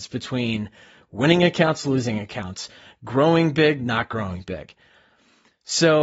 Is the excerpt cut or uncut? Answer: uncut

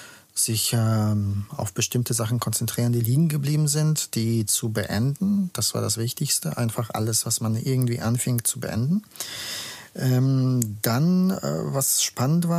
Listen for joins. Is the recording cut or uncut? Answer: uncut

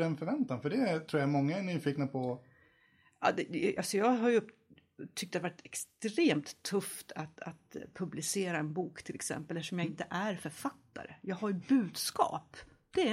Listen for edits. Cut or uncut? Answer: uncut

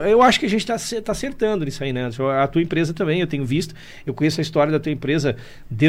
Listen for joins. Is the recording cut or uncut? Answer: uncut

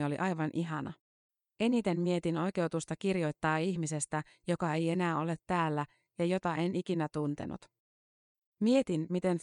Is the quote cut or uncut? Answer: cut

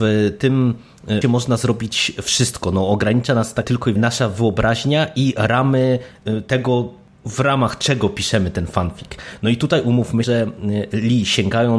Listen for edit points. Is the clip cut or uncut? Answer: cut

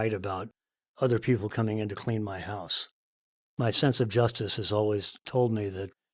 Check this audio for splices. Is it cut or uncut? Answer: uncut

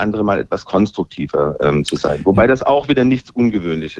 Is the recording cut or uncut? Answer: uncut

